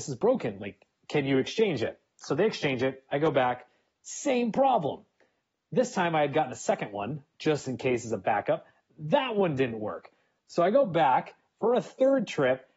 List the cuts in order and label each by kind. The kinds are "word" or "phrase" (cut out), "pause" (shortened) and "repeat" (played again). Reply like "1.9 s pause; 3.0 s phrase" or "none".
none